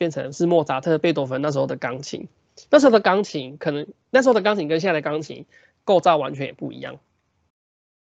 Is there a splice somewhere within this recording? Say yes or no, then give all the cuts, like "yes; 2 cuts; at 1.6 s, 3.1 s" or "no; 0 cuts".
no; 0 cuts